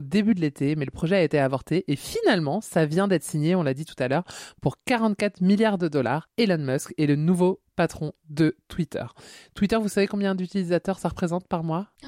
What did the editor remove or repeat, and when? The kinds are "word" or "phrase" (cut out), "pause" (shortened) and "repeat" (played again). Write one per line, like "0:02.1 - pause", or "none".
none